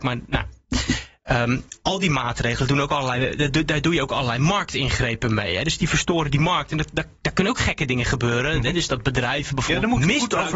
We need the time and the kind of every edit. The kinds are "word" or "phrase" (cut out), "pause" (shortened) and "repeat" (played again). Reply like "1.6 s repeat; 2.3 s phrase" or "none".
none